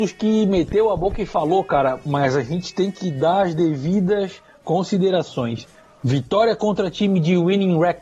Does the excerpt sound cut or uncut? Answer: uncut